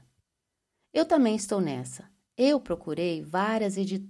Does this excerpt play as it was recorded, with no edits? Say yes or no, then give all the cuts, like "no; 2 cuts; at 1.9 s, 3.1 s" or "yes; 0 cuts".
yes; 0 cuts